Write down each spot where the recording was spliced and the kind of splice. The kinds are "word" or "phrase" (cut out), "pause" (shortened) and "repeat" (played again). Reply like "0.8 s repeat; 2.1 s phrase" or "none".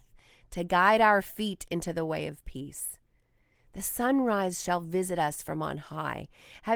none